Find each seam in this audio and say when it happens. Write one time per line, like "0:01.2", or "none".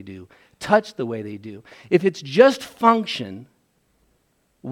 none